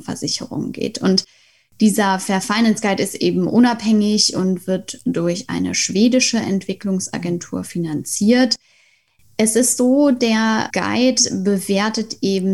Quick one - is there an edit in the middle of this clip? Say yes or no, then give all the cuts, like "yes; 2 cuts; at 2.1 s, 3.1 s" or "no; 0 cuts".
yes; 1 cut; at 10.7 s